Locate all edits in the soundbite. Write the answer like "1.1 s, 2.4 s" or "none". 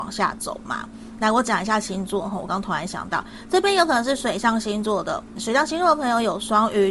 5.4 s